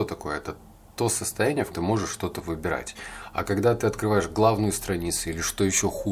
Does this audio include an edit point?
yes; 1 cut; at 1.7 s

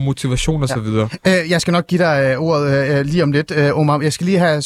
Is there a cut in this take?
no; 0 cuts

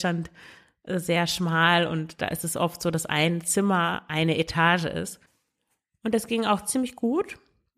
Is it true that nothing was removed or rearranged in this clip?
yes; 0 cuts

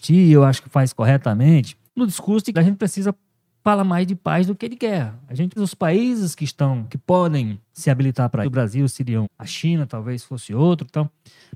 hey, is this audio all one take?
no; 6 cuts; at 1.9 s, 2.5 s, 5.6 s, 7.6 s, 8.4 s, 9.2 s

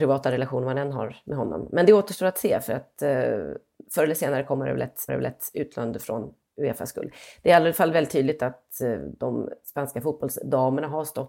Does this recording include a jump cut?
yes; 1 cut; at 5.1 s

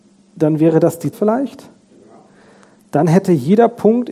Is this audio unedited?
no; 1 cut; at 1.1 s

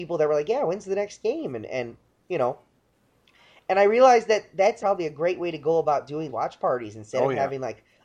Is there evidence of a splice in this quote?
yes; 2 cuts; at 4.8 s, 6.3 s

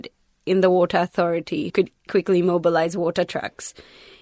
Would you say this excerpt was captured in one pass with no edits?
no; 2 cuts; at 1.7 s, 2.1 s

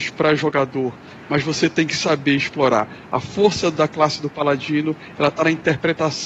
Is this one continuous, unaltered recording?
yes; 0 cuts

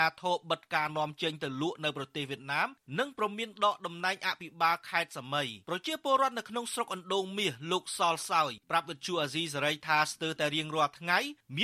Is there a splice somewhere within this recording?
yes; 1 cut; at 5.6 s

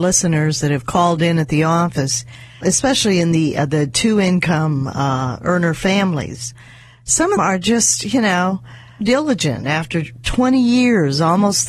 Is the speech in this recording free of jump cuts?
no; 3 cuts; at 2.6 s, 7.4 s, 9.0 s

